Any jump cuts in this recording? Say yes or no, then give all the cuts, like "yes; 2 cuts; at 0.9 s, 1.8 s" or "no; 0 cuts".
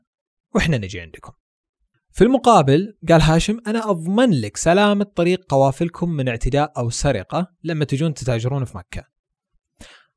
no; 0 cuts